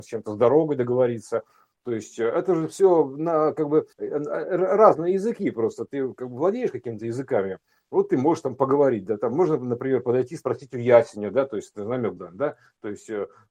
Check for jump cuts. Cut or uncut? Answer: cut